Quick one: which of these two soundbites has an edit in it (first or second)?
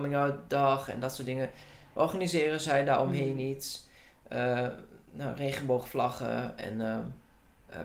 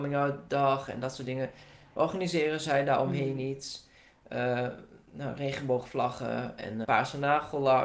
second